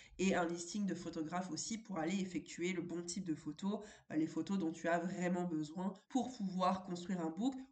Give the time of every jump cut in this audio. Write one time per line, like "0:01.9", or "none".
0:06.0